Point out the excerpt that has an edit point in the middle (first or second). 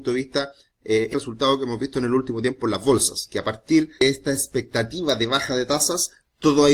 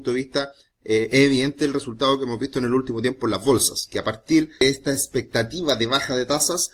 first